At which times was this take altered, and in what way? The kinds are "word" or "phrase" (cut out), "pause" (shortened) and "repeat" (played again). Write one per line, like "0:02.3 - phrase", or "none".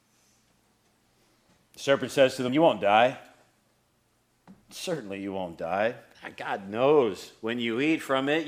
0:02.5 - word
0:04.6 - pause